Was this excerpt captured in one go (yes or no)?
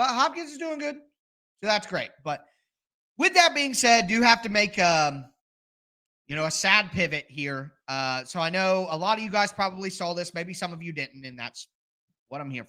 yes